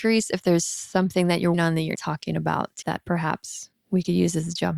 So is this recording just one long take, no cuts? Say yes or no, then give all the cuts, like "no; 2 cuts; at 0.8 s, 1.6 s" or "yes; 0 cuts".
no; 4 cuts; at 1.5 s, 2.0 s, 2.8 s, 3.7 s